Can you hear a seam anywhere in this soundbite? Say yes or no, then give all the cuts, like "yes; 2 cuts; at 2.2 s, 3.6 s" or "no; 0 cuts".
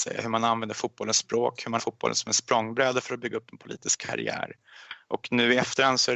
yes; 1 cut; at 1.8 s